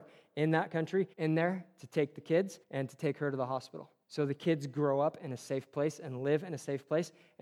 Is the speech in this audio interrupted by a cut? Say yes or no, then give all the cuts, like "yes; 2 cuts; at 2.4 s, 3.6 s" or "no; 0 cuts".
yes; 3 cuts; at 1.1 s, 2.6 s, 4.0 s